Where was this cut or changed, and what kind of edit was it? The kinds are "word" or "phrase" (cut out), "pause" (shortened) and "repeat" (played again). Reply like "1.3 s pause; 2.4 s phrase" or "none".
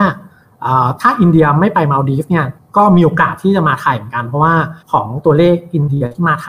2.6 s pause; 4.8 s pause